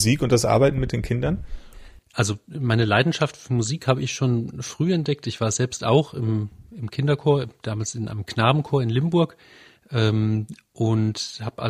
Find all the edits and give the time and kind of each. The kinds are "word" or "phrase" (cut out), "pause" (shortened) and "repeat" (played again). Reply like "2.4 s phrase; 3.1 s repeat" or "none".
none